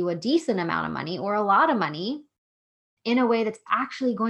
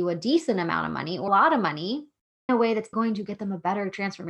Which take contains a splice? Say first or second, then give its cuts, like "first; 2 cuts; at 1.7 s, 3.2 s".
second; 3 cuts; at 1.3 s, 2.5 s, 2.9 s